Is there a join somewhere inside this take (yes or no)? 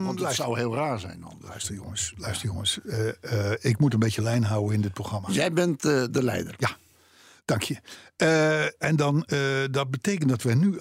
no